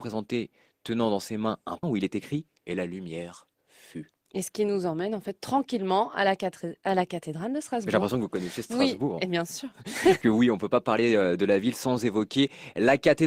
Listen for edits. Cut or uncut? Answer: cut